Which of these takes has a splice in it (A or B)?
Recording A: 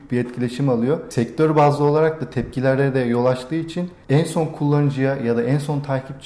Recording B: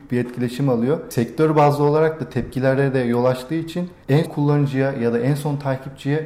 B